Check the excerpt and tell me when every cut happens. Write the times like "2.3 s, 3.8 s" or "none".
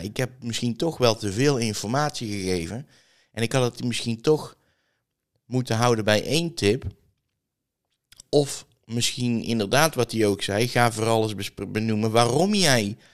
none